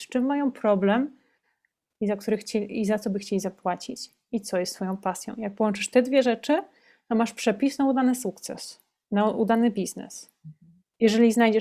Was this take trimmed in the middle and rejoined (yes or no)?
no